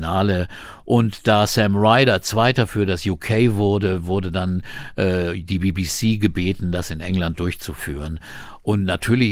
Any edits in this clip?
no; 0 cuts

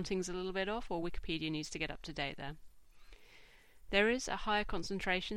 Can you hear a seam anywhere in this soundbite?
no; 0 cuts

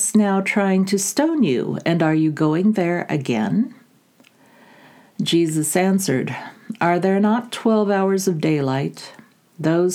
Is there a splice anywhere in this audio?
no; 0 cuts

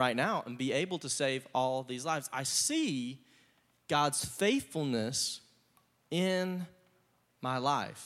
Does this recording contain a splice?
no; 0 cuts

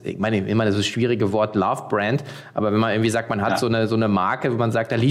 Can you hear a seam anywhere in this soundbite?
no; 0 cuts

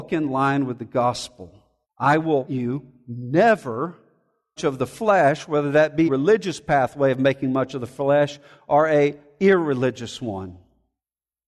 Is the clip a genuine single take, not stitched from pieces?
no; 4 cuts; at 1.8 s, 2.5 s, 4.6 s, 6.1 s

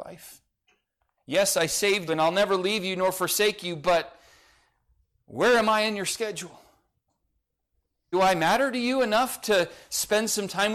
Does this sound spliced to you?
yes; 2 cuts; at 2.1 s, 8.1 s

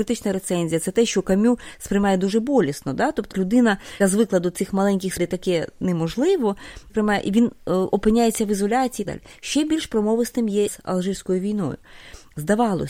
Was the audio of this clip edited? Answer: yes; 6 cuts; at 3.3 s, 4.0 s, 5.2 s, 6.9 s, 9.0 s, 10.7 s

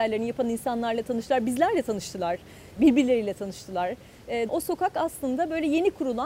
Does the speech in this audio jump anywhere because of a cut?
yes; 2 cuts; at 2.8 s, 4.5 s

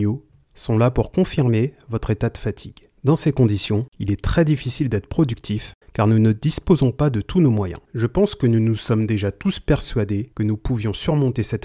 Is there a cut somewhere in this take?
yes; 5 cuts; at 3.0 s, 3.9 s, 5.8 s, 7.8 s, 10.3 s

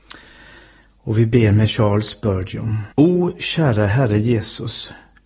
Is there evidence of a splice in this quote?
yes; 1 cut; at 2.9 s

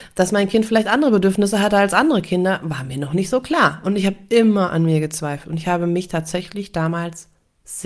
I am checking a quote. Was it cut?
no; 0 cuts

